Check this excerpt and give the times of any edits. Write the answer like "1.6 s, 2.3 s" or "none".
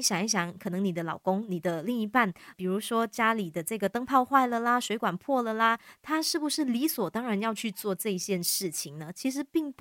2.5 s